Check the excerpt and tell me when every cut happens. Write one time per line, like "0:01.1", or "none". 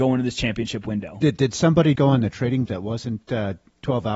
0:02.0
0:02.7